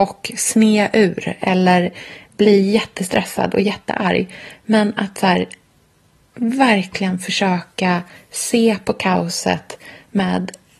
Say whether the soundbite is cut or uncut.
uncut